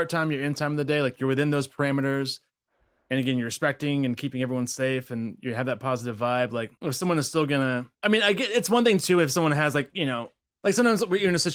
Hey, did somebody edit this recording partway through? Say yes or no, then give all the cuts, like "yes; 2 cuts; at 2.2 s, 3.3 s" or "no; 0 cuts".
yes; 2 cuts; at 6.8 s, 7.9 s